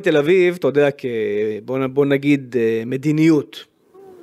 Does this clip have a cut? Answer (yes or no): no